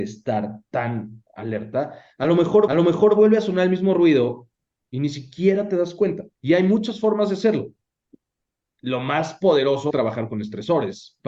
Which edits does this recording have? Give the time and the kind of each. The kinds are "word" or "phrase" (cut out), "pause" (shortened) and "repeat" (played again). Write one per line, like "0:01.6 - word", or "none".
0:02.7 - repeat
0:06.4 - pause
0:09.9 - word